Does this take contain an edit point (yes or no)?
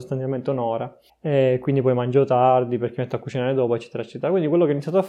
yes